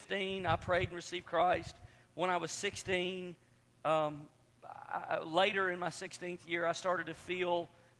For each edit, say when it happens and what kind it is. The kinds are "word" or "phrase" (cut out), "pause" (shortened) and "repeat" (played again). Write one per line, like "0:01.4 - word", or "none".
none